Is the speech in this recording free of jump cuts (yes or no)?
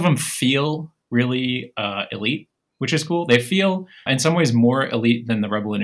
no